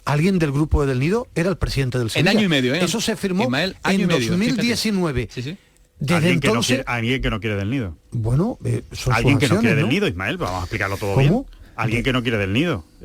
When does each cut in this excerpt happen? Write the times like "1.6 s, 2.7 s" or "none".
11.7 s